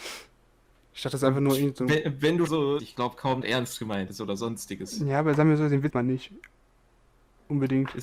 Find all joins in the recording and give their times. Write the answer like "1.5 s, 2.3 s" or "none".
2.5 s, 2.8 s, 3.4 s, 5.9 s